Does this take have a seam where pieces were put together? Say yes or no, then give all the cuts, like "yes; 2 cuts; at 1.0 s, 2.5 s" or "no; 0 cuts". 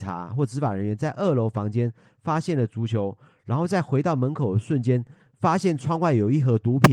no; 0 cuts